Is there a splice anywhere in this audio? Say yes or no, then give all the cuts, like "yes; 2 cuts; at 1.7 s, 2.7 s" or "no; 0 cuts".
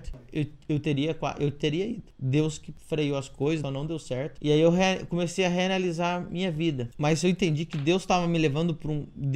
yes; 1 cut; at 3.6 s